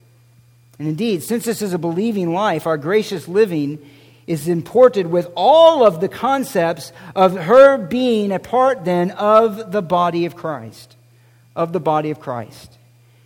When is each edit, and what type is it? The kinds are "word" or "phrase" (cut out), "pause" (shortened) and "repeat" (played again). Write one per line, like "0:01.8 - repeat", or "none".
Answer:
none